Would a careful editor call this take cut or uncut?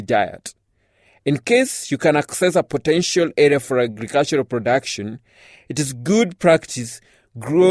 uncut